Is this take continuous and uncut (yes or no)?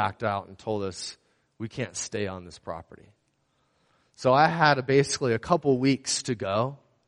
yes